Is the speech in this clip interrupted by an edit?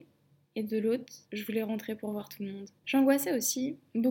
yes; 2 cuts; at 1.2 s, 2.8 s

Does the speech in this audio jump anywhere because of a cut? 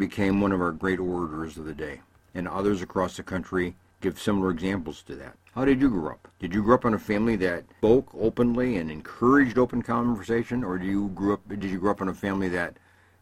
no; 0 cuts

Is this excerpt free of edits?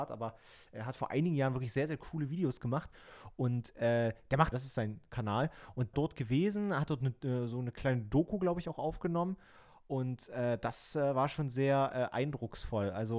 no; 2 cuts; at 4.5 s, 5.9 s

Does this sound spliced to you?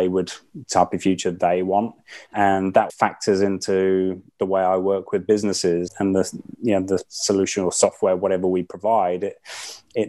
yes; 2 cuts; at 2.9 s, 5.9 s

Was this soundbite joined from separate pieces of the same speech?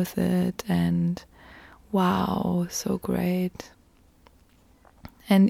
no; 0 cuts

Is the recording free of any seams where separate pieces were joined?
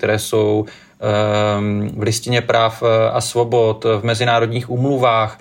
yes; 0 cuts

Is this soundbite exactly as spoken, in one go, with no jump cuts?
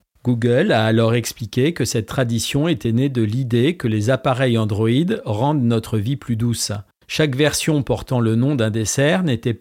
yes; 0 cuts

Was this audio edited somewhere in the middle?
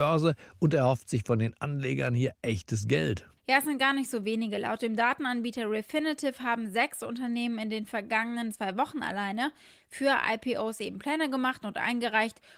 yes; 1 cut; at 3.4 s

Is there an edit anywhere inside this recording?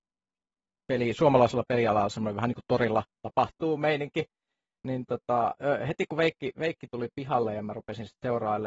no; 0 cuts

